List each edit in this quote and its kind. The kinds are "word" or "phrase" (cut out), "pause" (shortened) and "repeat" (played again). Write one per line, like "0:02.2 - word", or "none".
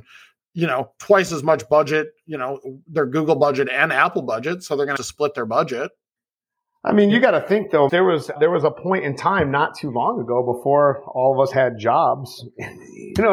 0:05.0 - phrase
0:06.2 - pause
0:07.9 - phrase
0:08.4 - word